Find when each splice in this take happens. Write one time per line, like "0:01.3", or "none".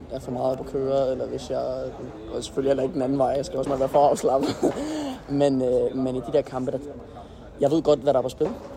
0:03.7